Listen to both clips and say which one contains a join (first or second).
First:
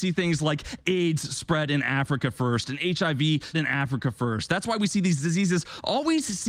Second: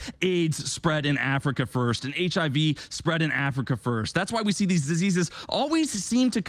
first